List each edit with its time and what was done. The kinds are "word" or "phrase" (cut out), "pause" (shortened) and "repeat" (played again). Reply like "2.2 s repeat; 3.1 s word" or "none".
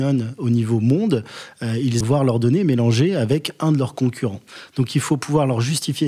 2.0 s phrase